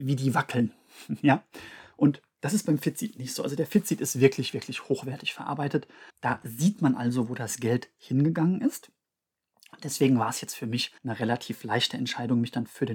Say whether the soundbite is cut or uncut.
cut